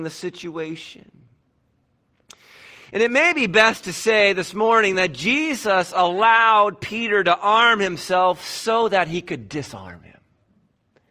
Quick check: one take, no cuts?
yes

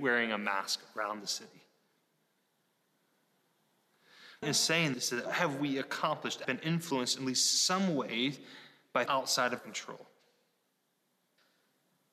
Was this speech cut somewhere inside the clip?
yes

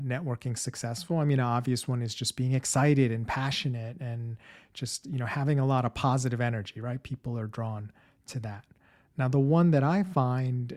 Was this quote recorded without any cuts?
yes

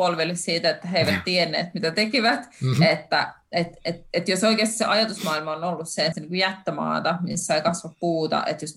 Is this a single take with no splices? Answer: no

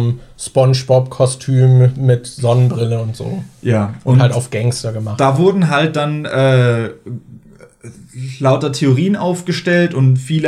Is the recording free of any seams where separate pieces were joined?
yes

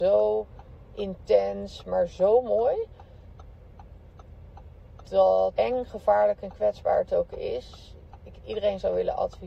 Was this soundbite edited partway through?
yes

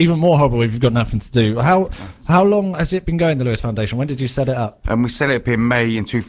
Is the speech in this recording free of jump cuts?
yes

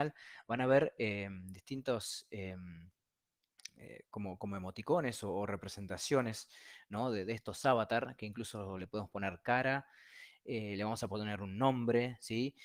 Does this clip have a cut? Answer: no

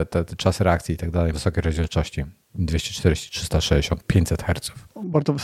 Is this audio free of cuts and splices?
no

